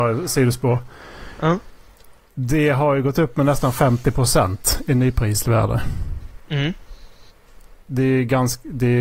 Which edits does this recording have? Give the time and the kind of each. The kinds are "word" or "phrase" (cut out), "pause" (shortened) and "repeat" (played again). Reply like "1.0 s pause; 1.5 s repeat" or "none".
none